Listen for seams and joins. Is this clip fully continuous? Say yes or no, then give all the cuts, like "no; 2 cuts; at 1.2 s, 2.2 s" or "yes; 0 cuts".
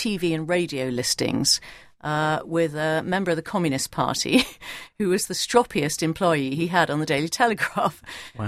yes; 0 cuts